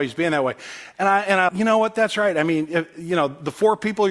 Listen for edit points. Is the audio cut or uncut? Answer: cut